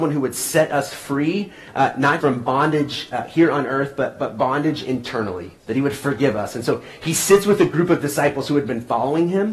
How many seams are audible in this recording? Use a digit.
2